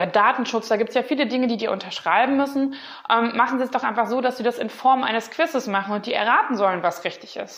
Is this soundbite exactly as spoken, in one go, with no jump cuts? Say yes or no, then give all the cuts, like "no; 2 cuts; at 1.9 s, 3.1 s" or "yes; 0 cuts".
yes; 0 cuts